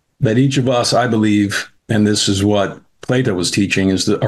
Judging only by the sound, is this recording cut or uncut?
cut